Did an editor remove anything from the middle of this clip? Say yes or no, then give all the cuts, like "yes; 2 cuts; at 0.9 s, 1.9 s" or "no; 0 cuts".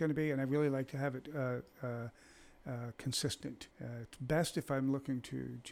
yes; 1 cut; at 3.7 s